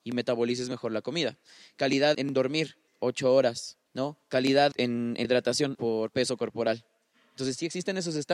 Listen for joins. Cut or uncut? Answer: cut